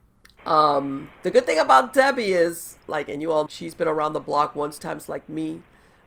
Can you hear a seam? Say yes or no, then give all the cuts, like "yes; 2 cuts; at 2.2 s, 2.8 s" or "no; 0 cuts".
yes; 4 cuts; at 1.1 s, 2.8 s, 3.5 s, 4.8 s